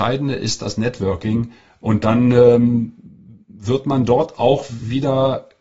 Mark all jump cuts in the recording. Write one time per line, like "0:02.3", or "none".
none